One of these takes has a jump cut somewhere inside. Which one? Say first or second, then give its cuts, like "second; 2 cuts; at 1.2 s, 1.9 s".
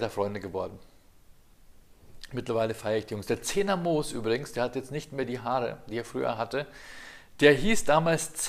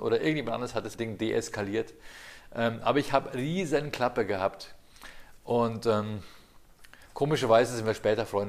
second; 2 cuts; at 0.9 s, 7.1 s